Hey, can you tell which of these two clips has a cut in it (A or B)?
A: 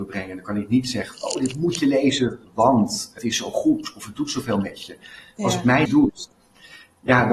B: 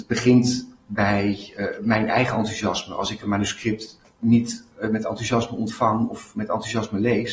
A